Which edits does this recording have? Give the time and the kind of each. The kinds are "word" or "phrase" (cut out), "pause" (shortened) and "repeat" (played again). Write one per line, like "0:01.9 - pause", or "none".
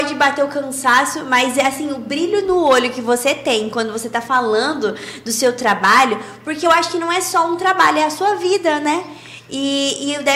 none